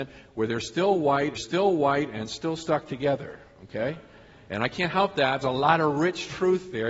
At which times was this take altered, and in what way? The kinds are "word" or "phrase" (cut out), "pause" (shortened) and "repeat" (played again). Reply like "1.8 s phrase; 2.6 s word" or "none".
1.4 s repeat; 5.4 s phrase